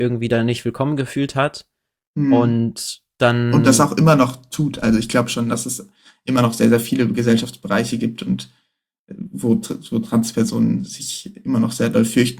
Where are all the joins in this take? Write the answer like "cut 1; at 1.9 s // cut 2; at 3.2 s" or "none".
none